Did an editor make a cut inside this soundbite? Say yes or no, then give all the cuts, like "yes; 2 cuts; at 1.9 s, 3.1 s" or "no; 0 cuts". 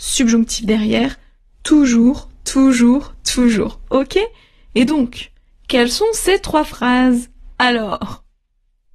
no; 0 cuts